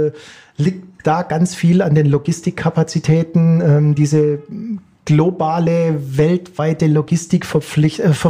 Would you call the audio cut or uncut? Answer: uncut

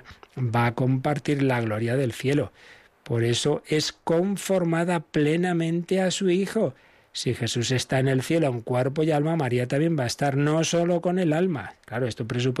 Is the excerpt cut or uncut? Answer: uncut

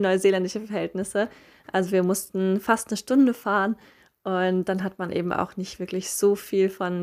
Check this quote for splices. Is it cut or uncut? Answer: uncut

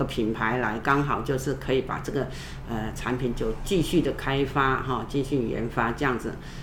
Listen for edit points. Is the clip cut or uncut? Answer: uncut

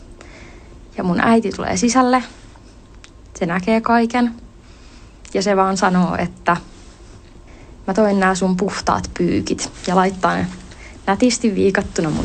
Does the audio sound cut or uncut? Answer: uncut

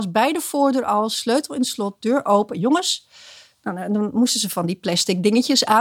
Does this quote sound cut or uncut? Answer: uncut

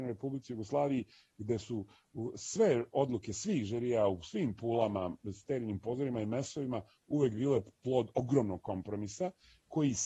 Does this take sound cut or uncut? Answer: uncut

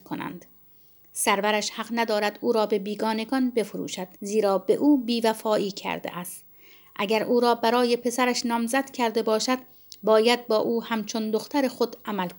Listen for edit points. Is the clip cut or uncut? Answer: cut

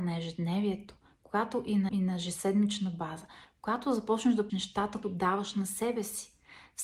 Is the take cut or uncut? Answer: cut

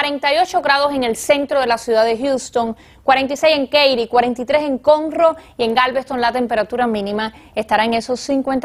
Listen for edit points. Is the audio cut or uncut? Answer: uncut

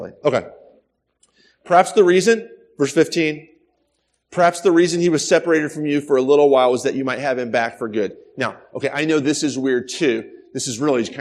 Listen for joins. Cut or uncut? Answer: uncut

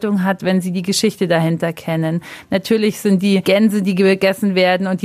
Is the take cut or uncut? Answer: uncut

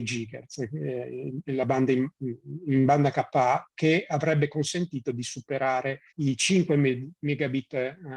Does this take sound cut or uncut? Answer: cut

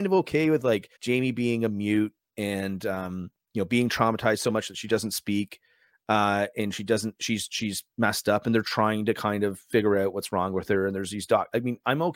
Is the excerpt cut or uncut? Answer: cut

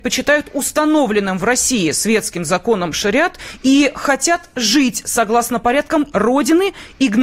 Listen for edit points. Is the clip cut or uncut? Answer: cut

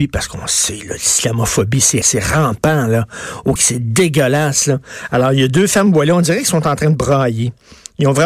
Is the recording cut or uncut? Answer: cut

